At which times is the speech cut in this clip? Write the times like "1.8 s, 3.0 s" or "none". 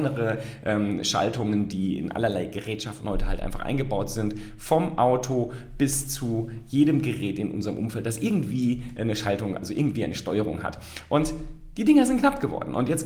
none